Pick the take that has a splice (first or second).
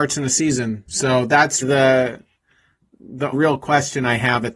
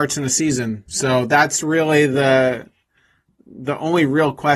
first